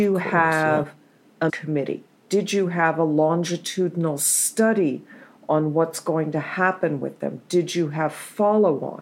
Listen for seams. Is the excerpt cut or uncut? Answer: cut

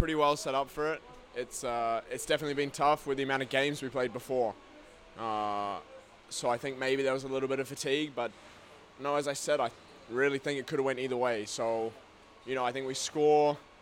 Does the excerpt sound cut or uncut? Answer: uncut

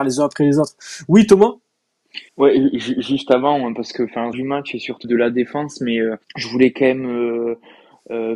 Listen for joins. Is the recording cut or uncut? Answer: cut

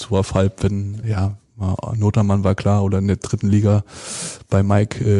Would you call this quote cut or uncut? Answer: cut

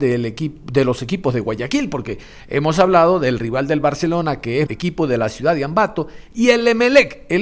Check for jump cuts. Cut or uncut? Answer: cut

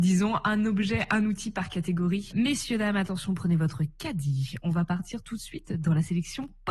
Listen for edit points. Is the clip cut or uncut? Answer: uncut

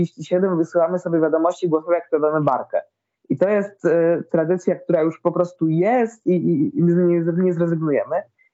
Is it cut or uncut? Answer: uncut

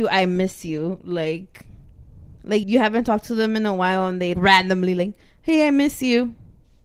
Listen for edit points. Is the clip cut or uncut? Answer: cut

